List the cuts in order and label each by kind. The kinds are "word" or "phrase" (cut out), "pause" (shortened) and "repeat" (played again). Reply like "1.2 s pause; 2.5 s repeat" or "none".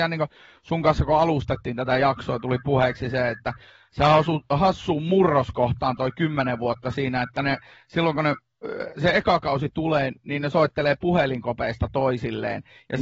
none